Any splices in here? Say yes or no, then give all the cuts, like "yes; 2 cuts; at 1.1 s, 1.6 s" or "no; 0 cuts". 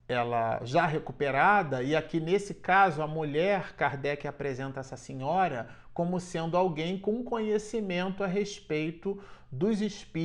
no; 0 cuts